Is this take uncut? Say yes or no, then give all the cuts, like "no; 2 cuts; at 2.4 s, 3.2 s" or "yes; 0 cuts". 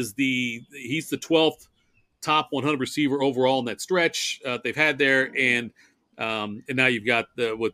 yes; 0 cuts